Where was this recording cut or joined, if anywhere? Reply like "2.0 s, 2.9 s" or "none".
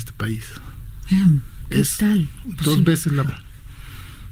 3.2 s